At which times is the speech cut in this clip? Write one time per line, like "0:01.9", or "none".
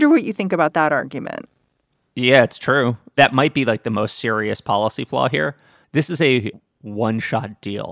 none